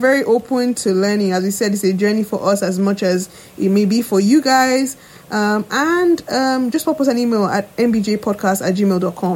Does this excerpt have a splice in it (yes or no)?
no